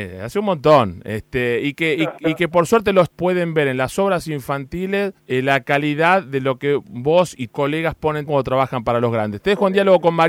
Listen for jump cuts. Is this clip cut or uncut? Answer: cut